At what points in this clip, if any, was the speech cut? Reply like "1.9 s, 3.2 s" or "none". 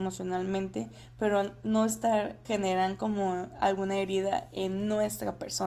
2.4 s